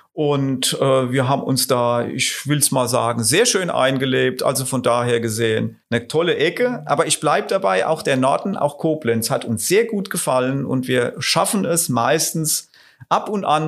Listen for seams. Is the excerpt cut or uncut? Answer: cut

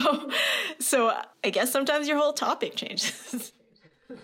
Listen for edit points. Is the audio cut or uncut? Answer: cut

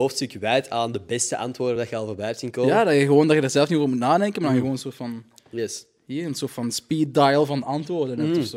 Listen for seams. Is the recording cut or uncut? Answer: uncut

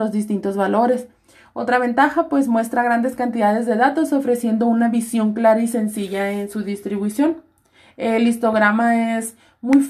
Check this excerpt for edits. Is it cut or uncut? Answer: uncut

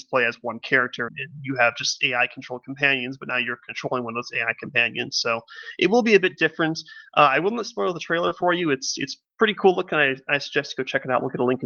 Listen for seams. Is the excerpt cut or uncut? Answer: cut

